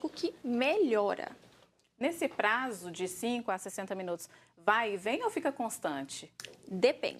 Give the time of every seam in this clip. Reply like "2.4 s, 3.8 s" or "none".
none